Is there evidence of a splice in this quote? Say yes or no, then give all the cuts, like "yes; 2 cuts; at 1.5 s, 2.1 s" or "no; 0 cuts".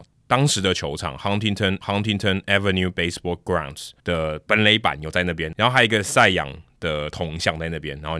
yes; 2 cuts; at 1.8 s, 4.0 s